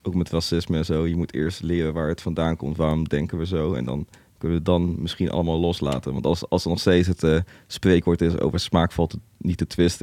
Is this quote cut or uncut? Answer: uncut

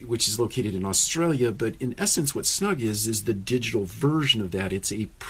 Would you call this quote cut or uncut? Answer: uncut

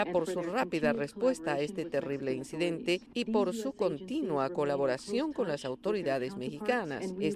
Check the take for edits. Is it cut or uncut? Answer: uncut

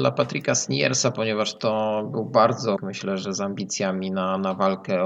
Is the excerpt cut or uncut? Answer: cut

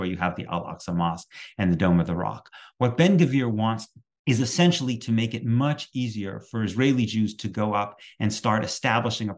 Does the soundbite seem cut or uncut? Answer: uncut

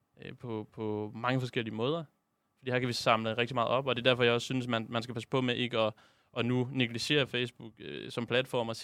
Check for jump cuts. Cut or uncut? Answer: uncut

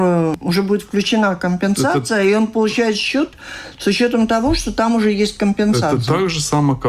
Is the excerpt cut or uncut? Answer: uncut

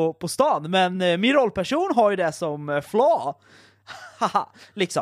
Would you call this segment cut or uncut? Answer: uncut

